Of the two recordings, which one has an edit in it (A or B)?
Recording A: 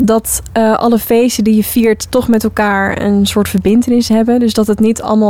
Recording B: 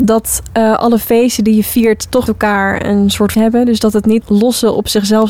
B